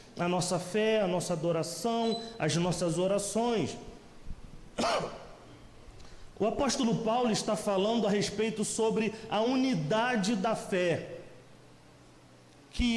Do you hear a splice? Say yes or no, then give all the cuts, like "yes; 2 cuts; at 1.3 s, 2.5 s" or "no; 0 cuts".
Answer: no; 0 cuts